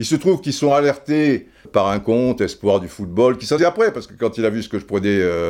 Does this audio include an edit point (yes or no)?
yes